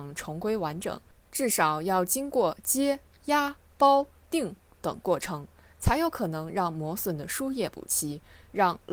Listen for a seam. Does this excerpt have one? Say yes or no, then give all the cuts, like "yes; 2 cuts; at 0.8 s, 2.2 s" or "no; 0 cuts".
yes; 1 cut; at 3.1 s